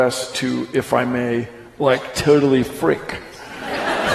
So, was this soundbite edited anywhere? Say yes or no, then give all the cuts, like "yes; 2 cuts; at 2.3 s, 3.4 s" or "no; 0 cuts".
no; 0 cuts